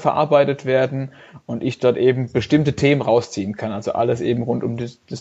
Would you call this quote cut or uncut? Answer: uncut